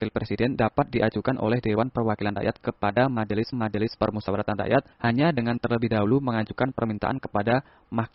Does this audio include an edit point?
yes; 2 cuts; at 3.5 s, 4.9 s

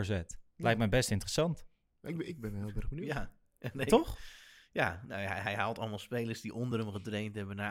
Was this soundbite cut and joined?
no; 0 cuts

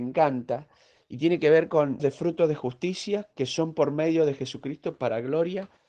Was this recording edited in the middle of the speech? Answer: yes; 1 cut; at 2.0 s

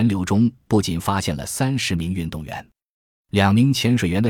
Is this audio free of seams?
yes; 0 cuts

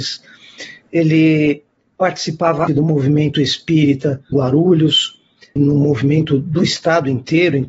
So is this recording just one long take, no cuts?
no; 3 cuts; at 2.7 s, 4.3 s, 5.6 s

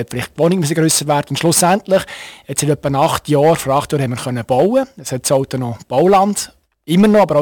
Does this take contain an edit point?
no; 0 cuts

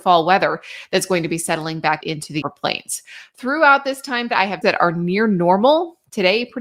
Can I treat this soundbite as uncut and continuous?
no; 4 cuts; at 2.0 s, 2.4 s, 4.3 s, 4.6 s

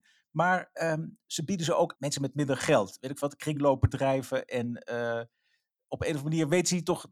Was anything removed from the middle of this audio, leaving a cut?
yes; 1 cut; at 1.9 s

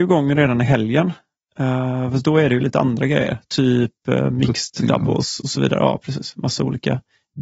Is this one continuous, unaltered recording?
yes; 0 cuts

